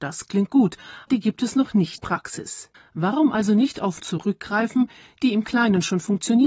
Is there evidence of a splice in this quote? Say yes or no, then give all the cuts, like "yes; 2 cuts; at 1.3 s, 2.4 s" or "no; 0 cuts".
yes; 4 cuts; at 1.1 s, 2.0 s, 2.7 s, 4.0 s